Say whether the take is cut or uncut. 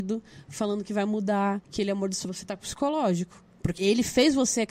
cut